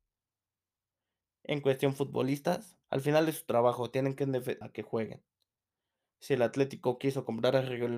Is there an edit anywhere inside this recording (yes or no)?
yes